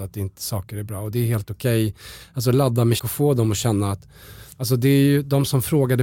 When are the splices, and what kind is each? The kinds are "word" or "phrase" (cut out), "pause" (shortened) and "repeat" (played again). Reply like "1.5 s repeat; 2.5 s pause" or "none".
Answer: 3.0 s word; 4.5 s pause